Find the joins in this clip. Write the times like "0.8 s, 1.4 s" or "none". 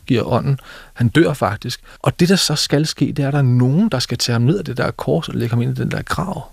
2.0 s